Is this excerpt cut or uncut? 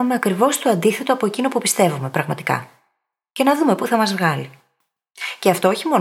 uncut